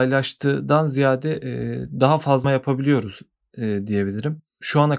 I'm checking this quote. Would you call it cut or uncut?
cut